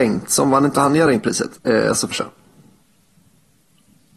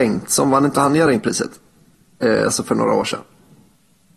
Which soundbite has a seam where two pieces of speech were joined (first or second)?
first